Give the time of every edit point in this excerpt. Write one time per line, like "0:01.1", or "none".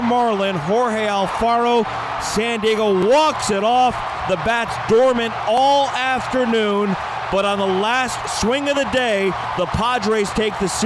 none